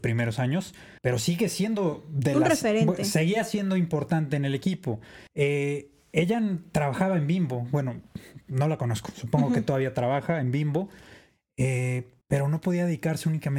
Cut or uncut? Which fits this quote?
cut